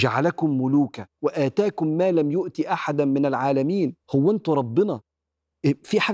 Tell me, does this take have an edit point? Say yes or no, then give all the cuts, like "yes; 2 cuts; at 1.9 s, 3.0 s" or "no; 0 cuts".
yes; 2 cuts; at 1.1 s, 4.0 s